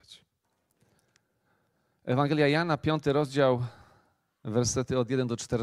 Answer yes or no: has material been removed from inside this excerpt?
no